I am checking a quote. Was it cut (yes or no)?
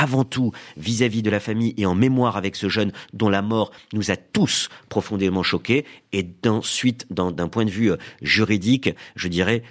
no